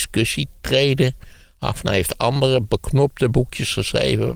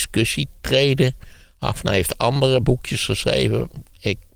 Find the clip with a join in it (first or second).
second